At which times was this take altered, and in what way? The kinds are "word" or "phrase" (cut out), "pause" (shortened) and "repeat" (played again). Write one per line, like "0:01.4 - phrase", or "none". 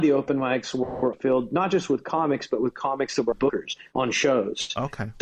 0:01.1 - word
0:03.3 - word

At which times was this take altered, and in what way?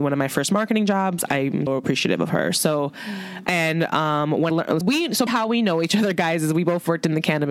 0:01.7 - word
0:04.5 - word
0:04.8 - word
0:05.3 - word

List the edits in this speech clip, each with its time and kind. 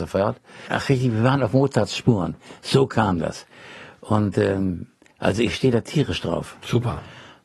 none

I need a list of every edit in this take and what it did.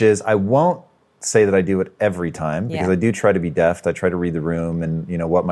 none

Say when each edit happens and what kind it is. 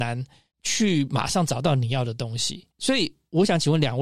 0:02.7 - pause

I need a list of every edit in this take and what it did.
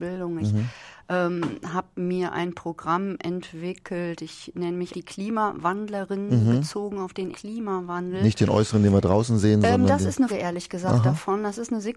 0:04.9 - word
0:07.3 - word
0:10.3 - word

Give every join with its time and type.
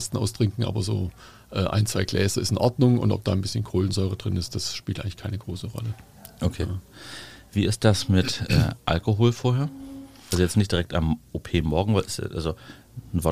none

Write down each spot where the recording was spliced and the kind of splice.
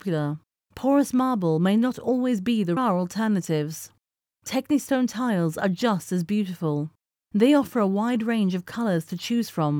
0:02.8 - phrase

